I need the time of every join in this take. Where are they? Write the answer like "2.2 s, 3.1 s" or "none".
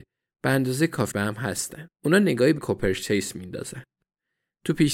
1.1 s, 1.9 s, 2.6 s